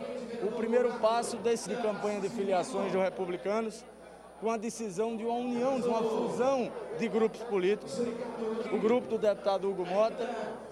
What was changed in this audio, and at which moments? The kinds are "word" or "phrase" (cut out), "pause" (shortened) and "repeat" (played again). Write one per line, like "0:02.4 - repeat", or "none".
0:01.7 - word
0:05.8 - phrase
0:08.7 - word